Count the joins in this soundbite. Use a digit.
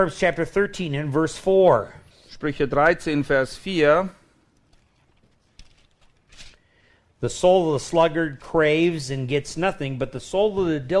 1